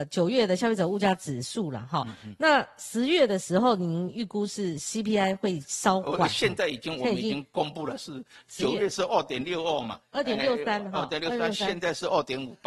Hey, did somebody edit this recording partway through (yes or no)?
no